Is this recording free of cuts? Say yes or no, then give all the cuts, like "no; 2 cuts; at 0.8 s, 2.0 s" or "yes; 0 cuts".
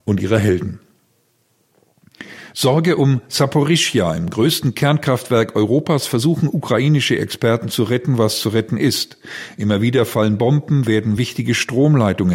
yes; 0 cuts